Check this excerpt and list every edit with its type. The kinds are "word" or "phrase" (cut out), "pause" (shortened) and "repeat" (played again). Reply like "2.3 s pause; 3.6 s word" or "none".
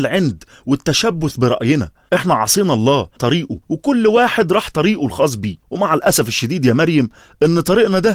3.2 s word; 3.6 s pause; 5.6 s pause